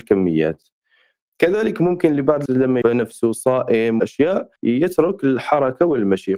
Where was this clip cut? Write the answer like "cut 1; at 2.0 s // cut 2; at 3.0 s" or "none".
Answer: cut 1; at 2.5 s // cut 2; at 2.8 s // cut 3; at 4.0 s // cut 4; at 4.6 s